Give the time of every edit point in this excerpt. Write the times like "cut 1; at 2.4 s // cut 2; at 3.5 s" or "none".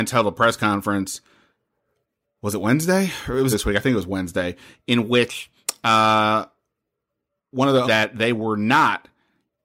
cut 1; at 3.5 s // cut 2; at 7.8 s